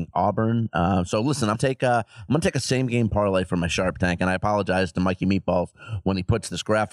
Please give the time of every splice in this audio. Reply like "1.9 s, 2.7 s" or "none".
1.5 s